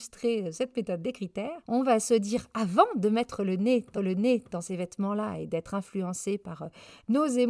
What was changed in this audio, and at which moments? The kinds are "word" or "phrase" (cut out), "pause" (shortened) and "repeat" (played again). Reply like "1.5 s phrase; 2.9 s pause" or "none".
3.9 s repeat